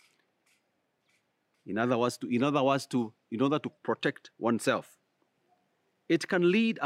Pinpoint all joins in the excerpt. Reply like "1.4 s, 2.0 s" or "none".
3.8 s